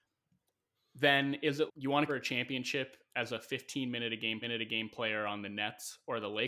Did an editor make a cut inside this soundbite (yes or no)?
yes